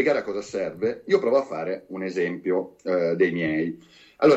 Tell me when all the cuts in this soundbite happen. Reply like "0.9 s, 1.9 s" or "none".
none